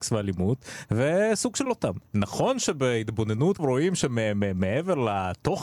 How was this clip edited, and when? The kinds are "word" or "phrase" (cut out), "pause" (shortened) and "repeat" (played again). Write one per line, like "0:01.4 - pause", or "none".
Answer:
0:01.7 - word
0:02.1 - pause
0:03.6 - phrase